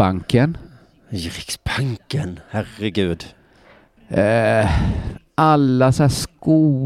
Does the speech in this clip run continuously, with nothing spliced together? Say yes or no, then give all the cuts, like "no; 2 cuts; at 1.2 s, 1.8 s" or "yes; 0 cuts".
yes; 0 cuts